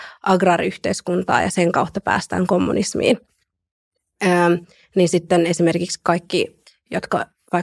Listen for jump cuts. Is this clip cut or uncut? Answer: uncut